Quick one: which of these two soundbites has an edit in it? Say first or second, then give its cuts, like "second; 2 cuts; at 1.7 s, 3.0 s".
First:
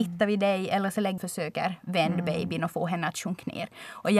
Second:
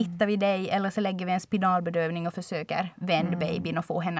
first; 1 cut; at 1.2 s